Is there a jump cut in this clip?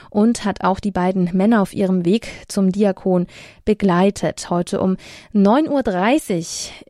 no; 0 cuts

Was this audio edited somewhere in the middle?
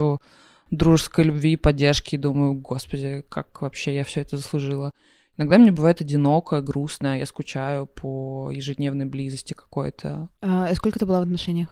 no; 0 cuts

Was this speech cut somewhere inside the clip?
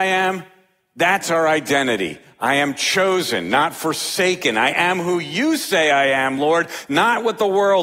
no; 0 cuts

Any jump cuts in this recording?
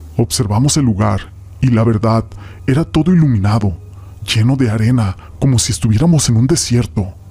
no; 0 cuts

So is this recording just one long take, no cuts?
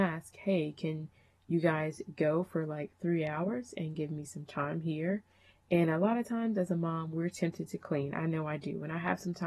yes; 0 cuts

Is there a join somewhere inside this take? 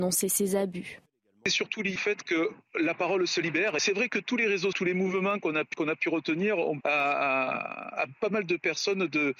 yes; 4 cuts; at 2.0 s, 4.7 s, 5.7 s, 6.8 s

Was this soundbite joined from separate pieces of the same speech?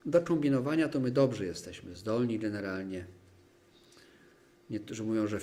no; 0 cuts

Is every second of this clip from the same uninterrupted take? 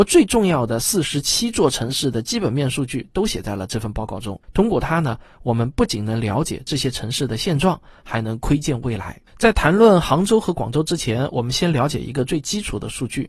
no; 2 cuts; at 4.4 s, 9.3 s

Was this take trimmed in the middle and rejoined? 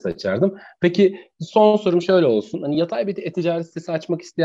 no; 0 cuts

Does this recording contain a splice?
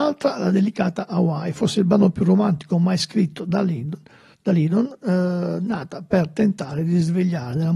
no; 0 cuts

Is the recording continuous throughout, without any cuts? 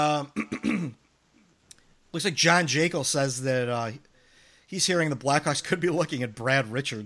yes; 0 cuts

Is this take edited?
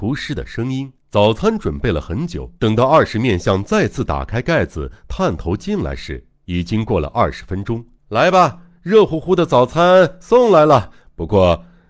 yes; 4 cuts; at 1.0 s, 2.6 s, 6.4 s, 8.0 s

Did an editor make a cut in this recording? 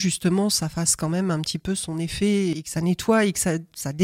no; 0 cuts

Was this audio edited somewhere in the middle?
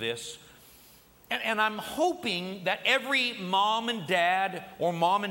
no; 0 cuts

